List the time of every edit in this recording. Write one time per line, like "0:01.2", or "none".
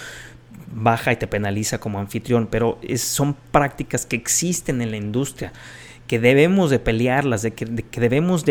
none